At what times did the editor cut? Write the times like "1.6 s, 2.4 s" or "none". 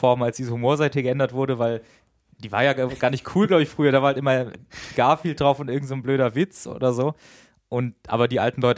none